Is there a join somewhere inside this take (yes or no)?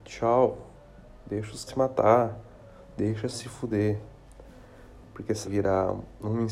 yes